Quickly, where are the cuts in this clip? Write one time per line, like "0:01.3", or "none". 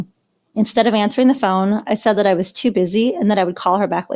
none